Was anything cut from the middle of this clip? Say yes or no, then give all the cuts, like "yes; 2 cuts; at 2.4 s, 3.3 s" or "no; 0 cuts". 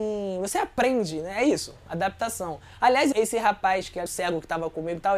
yes; 2 cuts; at 3.1 s, 4.1 s